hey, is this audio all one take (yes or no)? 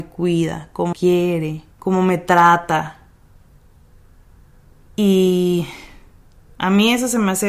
no